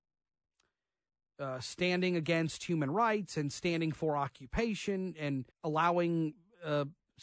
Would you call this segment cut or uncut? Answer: cut